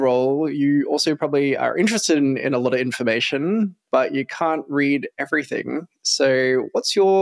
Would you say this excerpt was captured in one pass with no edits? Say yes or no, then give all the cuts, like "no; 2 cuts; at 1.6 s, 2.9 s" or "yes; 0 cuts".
yes; 0 cuts